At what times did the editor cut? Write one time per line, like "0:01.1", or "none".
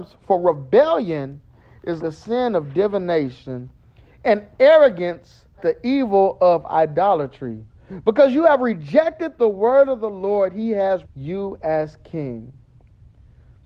0:02.0
0:05.6
0:11.0